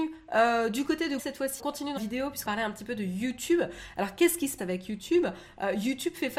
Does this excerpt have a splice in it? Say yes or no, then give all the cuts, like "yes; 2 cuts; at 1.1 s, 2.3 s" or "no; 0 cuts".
yes; 5 cuts; at 1.2 s, 1.6 s, 2.0 s, 2.5 s, 4.6 s